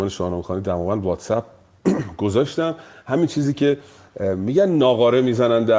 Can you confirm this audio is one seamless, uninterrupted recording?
yes; 0 cuts

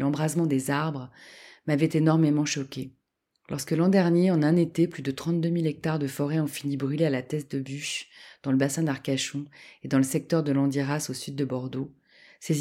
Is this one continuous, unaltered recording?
no; 1 cut; at 3.3 s

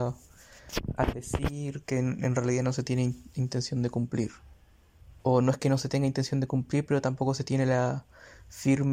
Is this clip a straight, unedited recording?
no; 1 cut; at 5.2 s

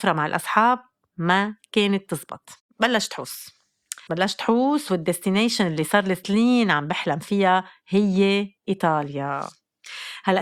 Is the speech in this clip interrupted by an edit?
yes; 3 cuts; at 2.6 s, 4.1 s, 8.6 s

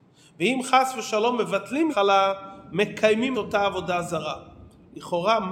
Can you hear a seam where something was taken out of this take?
yes; 2 cuts; at 1.9 s, 3.3 s

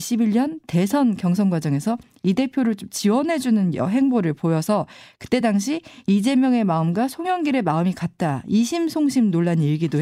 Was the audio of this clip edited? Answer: no; 0 cuts

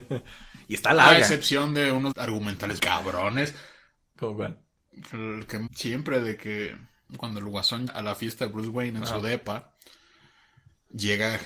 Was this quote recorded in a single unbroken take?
no; 6 cuts; at 2.1 s, 2.8 s, 5.1 s, 5.7 s, 7.1 s, 7.9 s

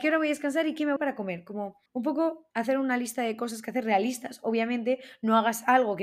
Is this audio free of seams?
no; 3 cuts; at 1.0 s, 1.9 s, 2.5 s

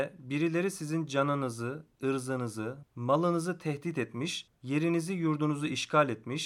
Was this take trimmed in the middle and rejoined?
yes; 1 cut; at 4.6 s

